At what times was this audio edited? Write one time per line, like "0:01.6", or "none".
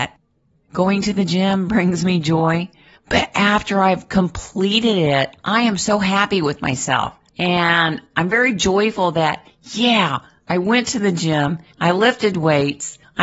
none

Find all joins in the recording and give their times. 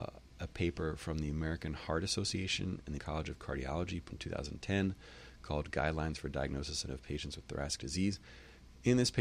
0:03.0
0:04.1
0:06.9
0:07.8

